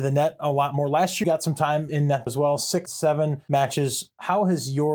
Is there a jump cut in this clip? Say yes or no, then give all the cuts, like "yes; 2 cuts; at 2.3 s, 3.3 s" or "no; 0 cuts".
yes; 4 cuts; at 1.2 s, 1.9 s, 2.3 s, 2.9 s